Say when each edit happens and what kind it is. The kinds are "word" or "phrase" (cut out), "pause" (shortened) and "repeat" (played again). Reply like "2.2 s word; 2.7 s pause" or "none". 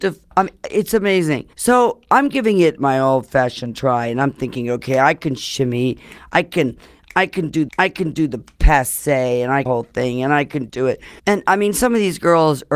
1.5 s pause; 7.7 s repeat; 9.7 s phrase; 10.7 s word; 11.2 s pause